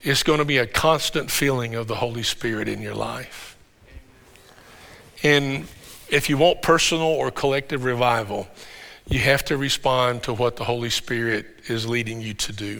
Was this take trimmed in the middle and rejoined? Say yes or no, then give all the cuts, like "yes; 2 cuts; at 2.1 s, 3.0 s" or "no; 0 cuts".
no; 0 cuts